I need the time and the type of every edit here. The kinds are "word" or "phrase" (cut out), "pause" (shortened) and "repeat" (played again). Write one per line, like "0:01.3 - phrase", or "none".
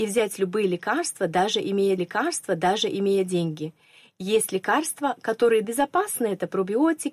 0:02.0 - repeat
0:05.6 - word